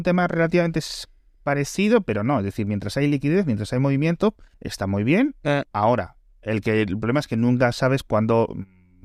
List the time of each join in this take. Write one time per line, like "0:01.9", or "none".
0:04.5